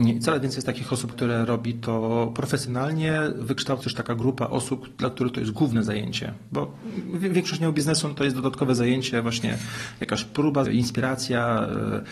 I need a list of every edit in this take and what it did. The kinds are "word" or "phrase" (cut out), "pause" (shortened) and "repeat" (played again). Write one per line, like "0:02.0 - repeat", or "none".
0:01.1 - word
0:03.8 - word
0:10.6 - phrase